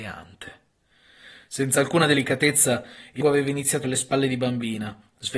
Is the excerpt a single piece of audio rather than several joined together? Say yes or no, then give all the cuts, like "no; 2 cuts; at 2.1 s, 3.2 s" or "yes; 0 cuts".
no; 2 cuts; at 3.2 s, 3.8 s